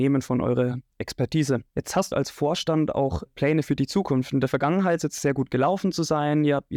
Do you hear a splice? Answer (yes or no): yes